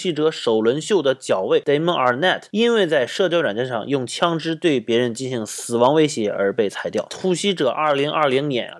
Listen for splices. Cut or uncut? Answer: uncut